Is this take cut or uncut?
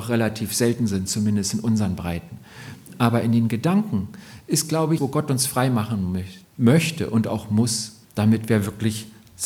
cut